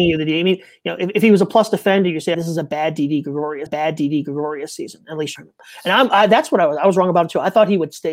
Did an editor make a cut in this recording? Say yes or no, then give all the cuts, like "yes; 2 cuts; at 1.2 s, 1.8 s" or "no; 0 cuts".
yes; 3 cuts; at 2.3 s, 3.7 s, 5.4 s